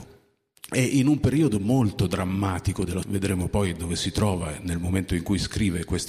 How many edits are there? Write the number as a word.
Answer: one